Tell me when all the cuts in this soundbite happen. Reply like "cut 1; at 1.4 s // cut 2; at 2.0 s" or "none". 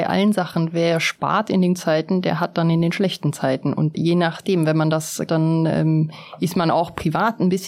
cut 1; at 1.7 s // cut 2; at 3.9 s // cut 3; at 5.3 s